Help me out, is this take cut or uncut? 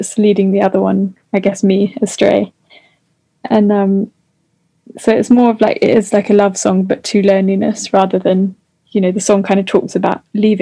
uncut